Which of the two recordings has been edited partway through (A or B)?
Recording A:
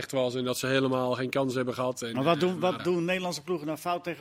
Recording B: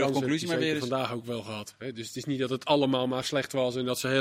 A